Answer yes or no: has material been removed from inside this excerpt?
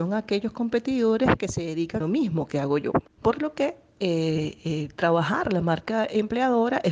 yes